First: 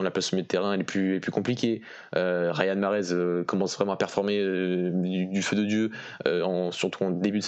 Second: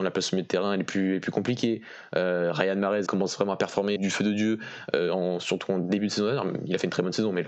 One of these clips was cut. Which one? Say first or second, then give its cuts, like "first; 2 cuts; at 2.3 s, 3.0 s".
second; 2 cuts; at 3.1 s, 4.0 s